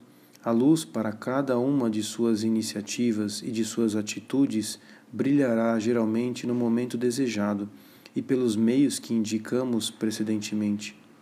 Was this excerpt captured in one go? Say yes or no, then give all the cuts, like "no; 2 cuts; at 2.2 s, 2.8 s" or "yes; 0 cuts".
yes; 0 cuts